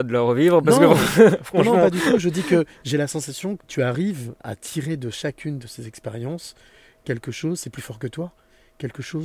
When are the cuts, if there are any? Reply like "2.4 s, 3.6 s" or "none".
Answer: 3.6 s, 4.4 s